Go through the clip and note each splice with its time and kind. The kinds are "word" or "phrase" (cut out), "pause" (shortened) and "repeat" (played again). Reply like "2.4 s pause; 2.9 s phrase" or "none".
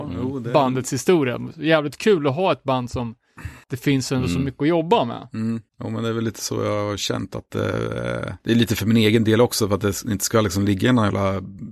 3.6 s pause; 5.7 s pause; 8.4 s pause